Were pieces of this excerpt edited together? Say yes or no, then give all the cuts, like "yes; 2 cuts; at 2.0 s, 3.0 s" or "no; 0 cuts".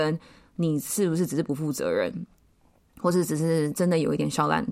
no; 0 cuts